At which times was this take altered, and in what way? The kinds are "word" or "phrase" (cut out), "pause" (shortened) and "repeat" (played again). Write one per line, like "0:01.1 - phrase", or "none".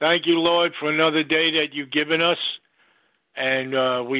none